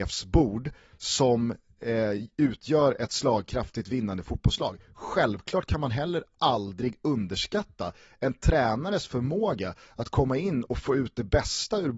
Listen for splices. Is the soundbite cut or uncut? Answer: uncut